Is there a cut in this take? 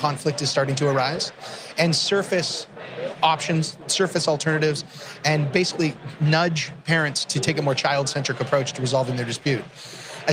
no; 0 cuts

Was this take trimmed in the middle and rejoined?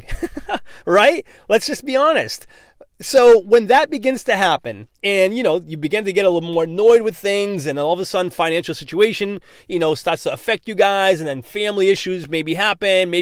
no; 0 cuts

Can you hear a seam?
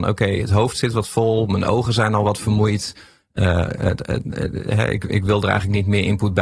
no; 0 cuts

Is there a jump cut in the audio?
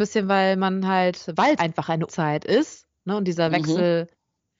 yes; 2 cuts; at 1.6 s, 2.1 s

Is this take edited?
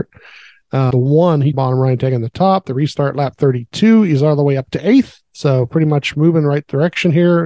yes; 3 cuts; at 0.9 s, 1.5 s, 5.2 s

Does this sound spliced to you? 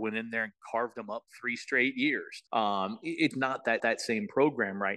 yes; 3 cuts; at 2.5 s, 3.3 s, 3.8 s

